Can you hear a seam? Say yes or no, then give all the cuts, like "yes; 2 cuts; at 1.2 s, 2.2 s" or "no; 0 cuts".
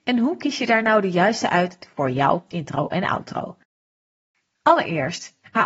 yes; 1 cut; at 2.5 s